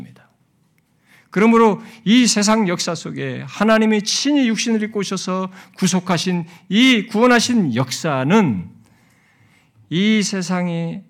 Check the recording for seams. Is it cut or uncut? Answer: uncut